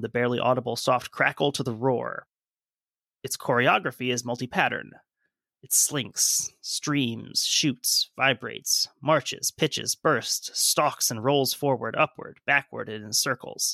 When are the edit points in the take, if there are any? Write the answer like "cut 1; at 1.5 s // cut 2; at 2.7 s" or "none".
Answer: none